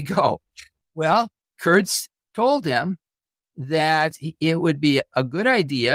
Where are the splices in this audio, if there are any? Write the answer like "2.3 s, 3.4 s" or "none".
none